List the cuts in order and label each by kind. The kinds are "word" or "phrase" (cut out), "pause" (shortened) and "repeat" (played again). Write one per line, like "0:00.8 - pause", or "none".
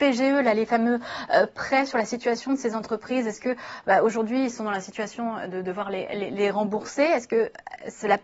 none